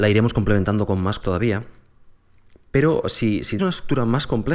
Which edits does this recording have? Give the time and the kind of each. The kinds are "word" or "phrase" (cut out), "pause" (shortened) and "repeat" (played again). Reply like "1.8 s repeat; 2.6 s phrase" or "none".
1.2 s word; 3.6 s word